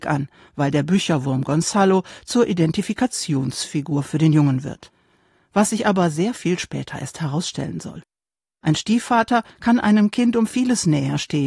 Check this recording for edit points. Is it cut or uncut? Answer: uncut